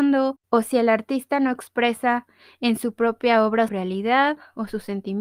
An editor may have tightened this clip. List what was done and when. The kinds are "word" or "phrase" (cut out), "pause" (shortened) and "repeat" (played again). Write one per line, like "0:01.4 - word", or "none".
0:03.7 - word

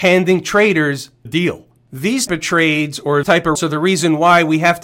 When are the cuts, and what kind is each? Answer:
0:01.3 - word
0:02.3 - word
0:03.2 - word
0:03.6 - word

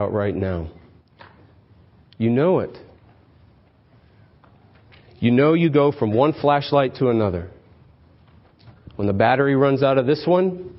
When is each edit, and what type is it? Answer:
none

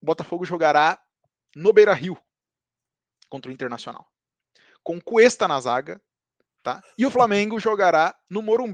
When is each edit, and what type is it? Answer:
0:06.9 - pause

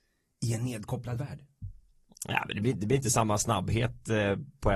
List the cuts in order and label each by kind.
none

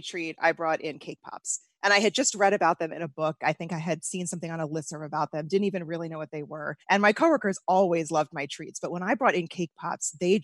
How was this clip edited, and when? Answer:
0:06.8 - pause

